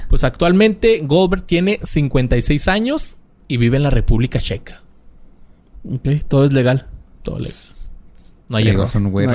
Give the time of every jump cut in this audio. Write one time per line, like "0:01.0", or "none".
none